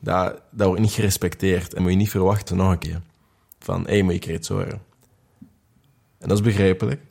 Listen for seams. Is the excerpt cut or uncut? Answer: cut